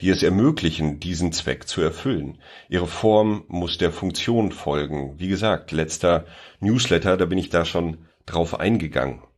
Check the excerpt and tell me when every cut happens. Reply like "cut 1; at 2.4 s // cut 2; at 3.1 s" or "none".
none